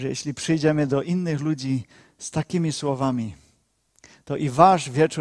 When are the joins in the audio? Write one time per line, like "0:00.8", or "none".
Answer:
none

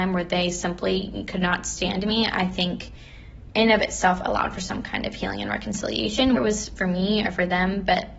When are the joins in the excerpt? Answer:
0:06.4
0:06.8

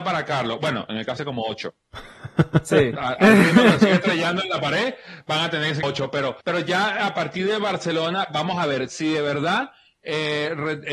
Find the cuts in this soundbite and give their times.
0:01.2
0:05.8
0:06.4

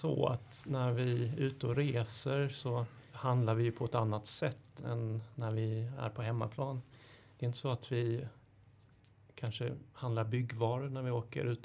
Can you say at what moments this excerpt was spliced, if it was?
none

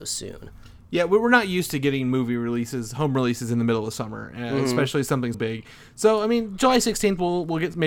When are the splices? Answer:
0:05.3

